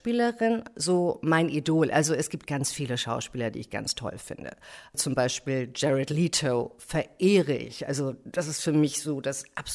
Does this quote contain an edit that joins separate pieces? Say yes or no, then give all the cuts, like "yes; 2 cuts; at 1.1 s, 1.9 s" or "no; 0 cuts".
no; 0 cuts